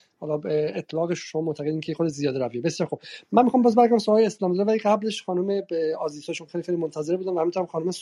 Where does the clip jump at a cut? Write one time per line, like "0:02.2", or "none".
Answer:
none